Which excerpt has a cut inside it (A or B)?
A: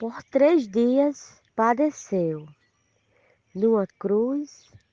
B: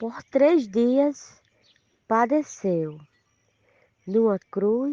A